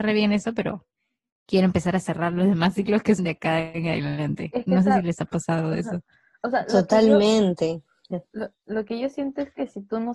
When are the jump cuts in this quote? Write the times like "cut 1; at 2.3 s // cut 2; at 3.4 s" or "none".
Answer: cut 1; at 3.2 s